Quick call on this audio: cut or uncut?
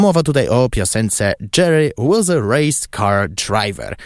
uncut